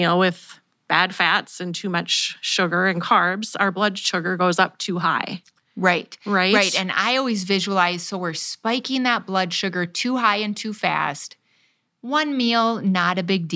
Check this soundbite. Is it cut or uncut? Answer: uncut